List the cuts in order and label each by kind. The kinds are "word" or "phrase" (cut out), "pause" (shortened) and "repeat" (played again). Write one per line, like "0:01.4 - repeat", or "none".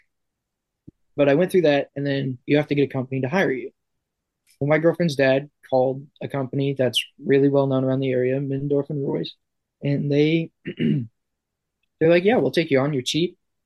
none